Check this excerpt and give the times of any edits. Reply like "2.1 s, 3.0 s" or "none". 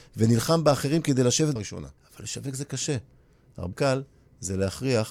1.6 s, 2.0 s, 3.7 s